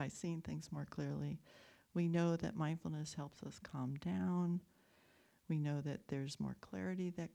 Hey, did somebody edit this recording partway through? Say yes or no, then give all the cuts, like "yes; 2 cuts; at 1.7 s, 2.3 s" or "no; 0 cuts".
no; 0 cuts